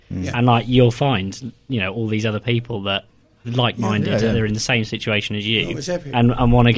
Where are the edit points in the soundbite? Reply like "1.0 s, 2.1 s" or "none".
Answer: 3.4 s